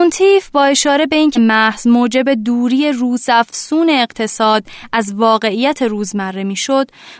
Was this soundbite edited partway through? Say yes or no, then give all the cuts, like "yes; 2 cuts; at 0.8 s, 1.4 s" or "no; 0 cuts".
yes; 1 cut; at 1.3 s